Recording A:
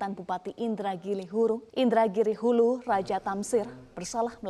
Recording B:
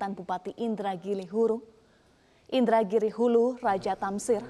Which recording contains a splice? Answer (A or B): A